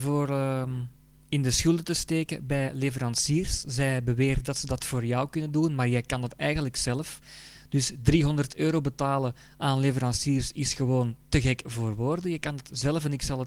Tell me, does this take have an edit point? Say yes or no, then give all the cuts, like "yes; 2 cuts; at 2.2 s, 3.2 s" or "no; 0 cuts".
no; 0 cuts